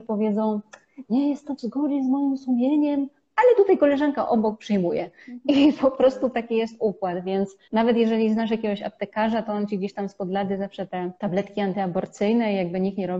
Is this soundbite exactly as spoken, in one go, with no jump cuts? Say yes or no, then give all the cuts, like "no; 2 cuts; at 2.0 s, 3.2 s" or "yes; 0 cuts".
no; 2 cuts; at 7.6 s, 11.2 s